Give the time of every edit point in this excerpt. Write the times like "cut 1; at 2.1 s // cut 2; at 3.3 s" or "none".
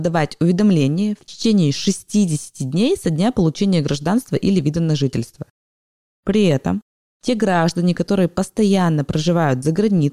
none